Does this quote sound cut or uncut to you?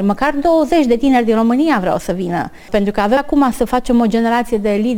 cut